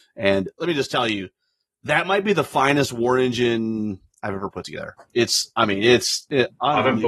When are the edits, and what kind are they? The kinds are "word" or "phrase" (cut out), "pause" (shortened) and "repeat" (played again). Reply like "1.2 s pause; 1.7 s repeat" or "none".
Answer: none